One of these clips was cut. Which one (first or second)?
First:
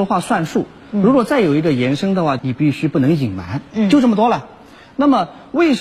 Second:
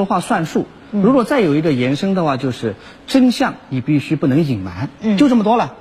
first